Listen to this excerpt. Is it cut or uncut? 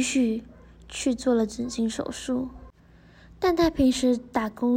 uncut